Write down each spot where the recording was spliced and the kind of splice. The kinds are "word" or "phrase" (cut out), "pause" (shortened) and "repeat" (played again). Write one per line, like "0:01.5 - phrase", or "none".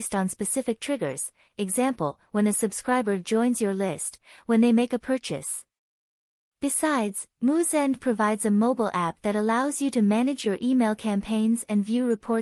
none